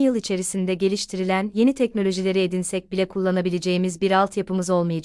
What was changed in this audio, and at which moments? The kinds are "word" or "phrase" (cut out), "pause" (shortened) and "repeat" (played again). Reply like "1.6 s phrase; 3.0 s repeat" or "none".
none